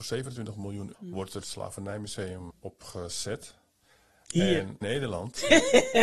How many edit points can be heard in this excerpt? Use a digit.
4